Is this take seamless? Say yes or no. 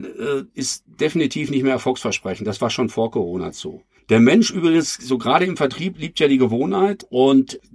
yes